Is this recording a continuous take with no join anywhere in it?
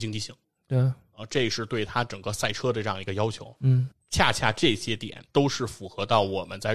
no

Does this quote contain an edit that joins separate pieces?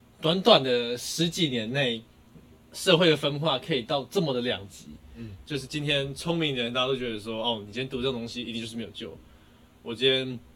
no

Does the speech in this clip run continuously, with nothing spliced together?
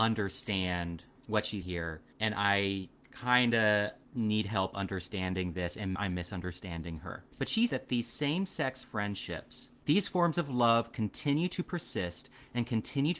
no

